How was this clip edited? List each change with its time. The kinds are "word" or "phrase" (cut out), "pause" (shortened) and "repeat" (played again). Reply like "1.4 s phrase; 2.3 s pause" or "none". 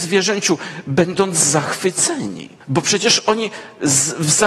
2.6 s pause